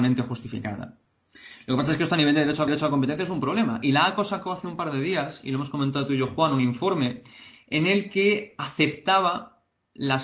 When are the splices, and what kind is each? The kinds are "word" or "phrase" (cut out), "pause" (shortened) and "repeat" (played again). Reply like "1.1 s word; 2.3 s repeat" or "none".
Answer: 2.7 s repeat